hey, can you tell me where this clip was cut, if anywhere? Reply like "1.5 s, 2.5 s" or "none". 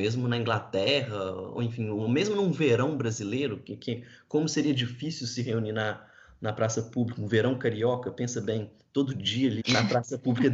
9.6 s